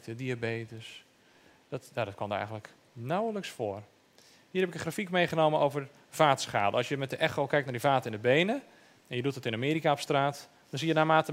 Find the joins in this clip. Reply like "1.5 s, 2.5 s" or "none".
none